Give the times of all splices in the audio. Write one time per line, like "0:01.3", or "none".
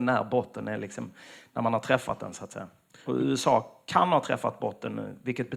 none